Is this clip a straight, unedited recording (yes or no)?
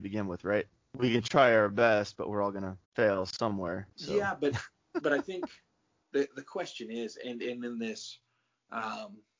no